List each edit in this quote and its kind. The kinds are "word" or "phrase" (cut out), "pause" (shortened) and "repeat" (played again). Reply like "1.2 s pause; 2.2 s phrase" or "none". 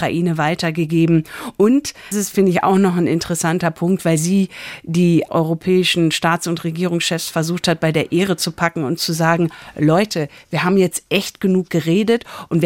2.1 s word; 5.3 s word